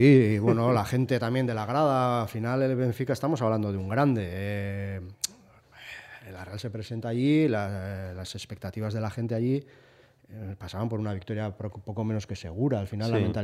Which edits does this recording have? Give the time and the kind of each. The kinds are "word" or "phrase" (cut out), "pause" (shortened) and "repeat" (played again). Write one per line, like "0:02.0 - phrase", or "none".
none